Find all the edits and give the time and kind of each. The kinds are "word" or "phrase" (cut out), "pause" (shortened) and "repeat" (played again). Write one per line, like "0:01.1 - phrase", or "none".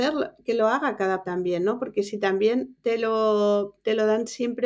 0:01.2 - word